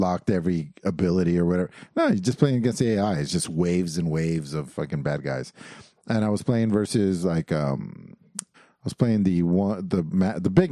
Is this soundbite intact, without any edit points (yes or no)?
no